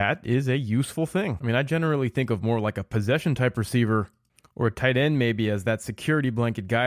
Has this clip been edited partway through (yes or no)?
no